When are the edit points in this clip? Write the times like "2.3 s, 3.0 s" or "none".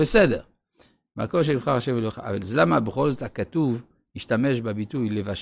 none